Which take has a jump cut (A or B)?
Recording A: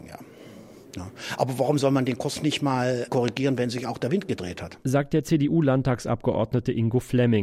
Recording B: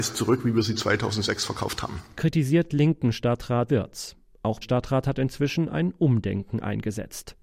B